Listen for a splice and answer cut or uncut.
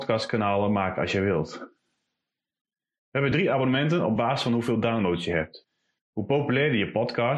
uncut